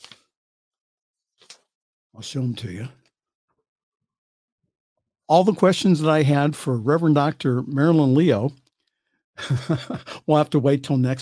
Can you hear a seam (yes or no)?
no